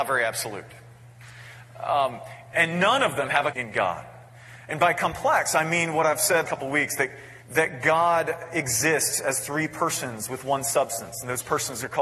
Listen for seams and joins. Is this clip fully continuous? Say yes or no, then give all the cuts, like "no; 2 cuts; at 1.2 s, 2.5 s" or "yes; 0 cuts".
no; 4 cuts; at 2.5 s, 3.5 s, 6.5 s, 7.4 s